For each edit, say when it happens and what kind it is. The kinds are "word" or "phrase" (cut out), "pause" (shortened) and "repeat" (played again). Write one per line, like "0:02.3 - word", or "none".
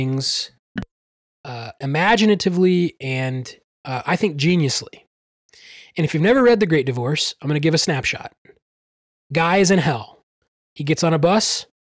none